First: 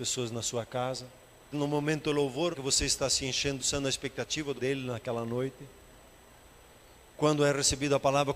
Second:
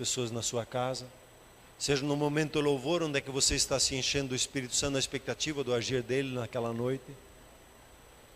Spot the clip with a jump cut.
first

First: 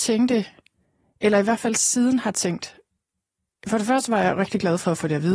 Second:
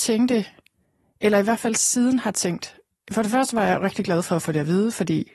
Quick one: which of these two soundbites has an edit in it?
second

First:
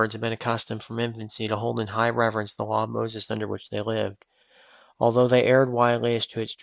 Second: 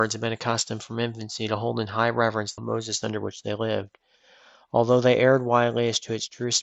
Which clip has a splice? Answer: second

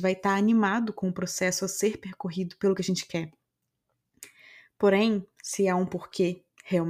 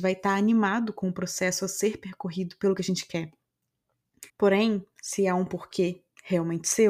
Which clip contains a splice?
second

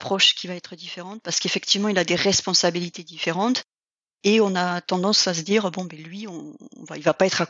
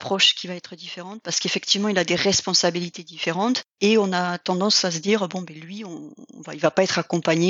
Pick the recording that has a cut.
second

